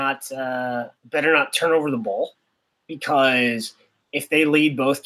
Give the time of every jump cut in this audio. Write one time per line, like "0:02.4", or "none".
0:01.0